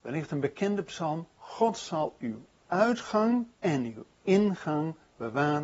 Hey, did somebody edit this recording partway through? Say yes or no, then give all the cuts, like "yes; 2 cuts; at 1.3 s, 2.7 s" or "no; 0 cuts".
yes; 1 cut; at 3.5 s